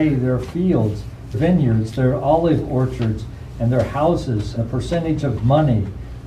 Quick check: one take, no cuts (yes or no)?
no